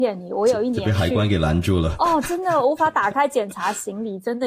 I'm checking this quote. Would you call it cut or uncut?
uncut